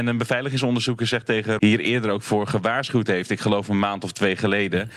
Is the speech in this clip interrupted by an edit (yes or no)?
yes